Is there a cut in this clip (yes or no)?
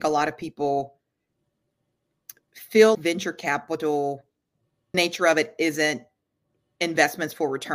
yes